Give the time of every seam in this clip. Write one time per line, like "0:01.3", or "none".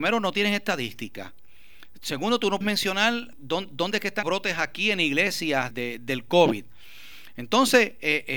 0:02.6
0:03.3
0:04.2
0:05.7